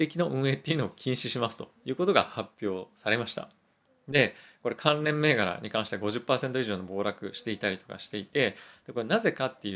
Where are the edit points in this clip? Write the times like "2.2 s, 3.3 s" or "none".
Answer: none